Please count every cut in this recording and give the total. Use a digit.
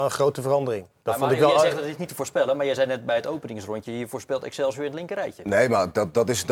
0